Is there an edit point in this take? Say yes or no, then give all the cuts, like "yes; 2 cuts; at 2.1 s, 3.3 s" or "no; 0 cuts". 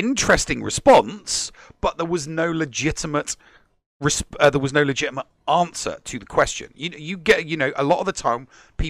no; 0 cuts